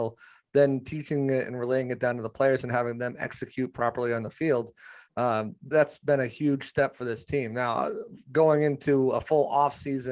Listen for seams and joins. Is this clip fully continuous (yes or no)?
no